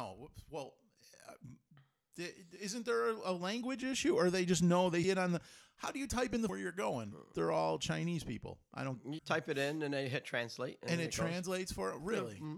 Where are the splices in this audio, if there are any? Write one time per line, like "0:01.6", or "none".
0:05.0
0:06.5
0:07.3
0:09.2

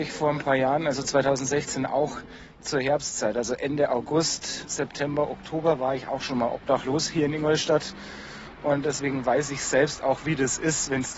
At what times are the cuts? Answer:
none

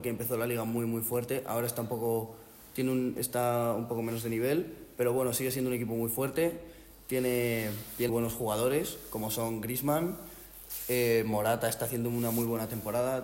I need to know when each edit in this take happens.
0:08.1

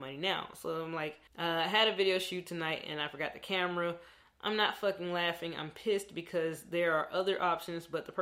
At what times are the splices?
0:01.3

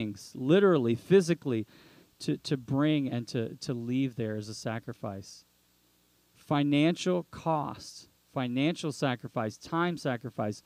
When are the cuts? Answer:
none

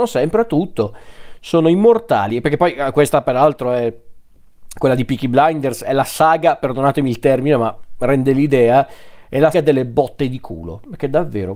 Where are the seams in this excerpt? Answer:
0:09.5

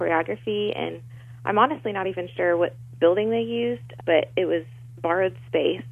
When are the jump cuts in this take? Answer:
none

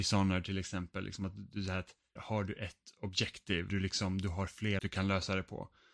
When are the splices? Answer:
0:02.2
0:03.7
0:04.8

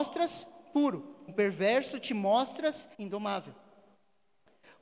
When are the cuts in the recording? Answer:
0:01.3
0:02.9

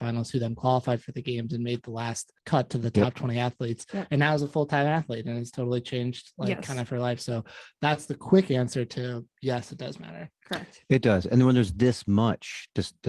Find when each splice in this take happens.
0:02.4

